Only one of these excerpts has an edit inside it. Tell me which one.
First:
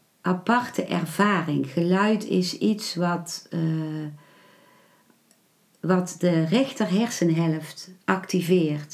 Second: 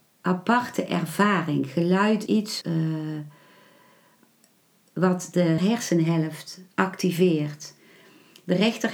second; 3 cuts; at 2.3 s, 2.6 s, 5.6 s

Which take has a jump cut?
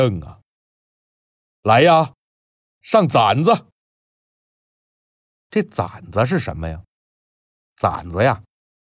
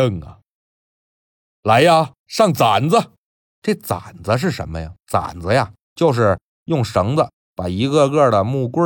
second; 4 cuts; at 2.2 s, 3.5 s, 5.0 s, 5.8 s

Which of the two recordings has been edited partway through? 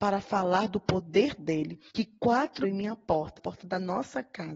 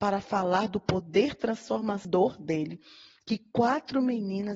first; 4 cuts; at 1.4 s, 1.9 s, 2.6 s, 3.4 s

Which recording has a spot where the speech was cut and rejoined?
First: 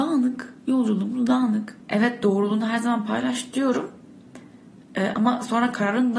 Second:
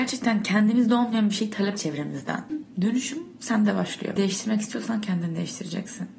second; 2 cuts; at 1.8 s, 4.2 s

